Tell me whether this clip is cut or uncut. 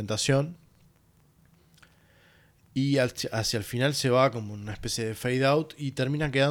uncut